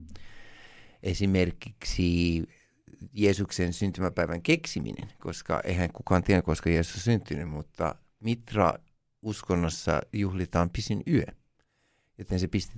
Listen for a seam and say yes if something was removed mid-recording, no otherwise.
no